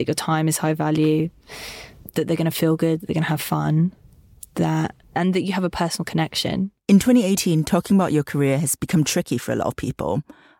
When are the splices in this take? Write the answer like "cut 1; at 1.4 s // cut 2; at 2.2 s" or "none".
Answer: cut 1; at 5.0 s // cut 2; at 6.8 s